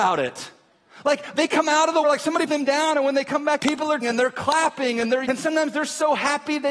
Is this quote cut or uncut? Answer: cut